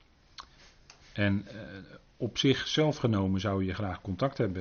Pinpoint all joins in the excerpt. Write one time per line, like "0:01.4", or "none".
none